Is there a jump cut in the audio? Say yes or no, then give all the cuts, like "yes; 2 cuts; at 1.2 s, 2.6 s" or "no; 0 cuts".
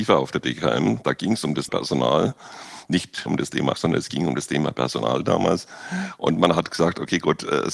yes; 3 cuts; at 1.7 s, 3.3 s, 3.7 s